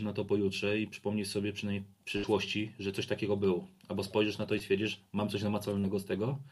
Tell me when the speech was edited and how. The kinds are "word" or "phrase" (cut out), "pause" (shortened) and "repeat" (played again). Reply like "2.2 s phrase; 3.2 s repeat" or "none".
none